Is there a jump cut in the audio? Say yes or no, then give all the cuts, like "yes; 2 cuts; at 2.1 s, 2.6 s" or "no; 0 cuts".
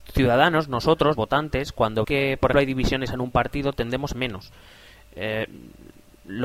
yes; 5 cuts; at 1.1 s, 2.0 s, 2.5 s, 3.1 s, 4.1 s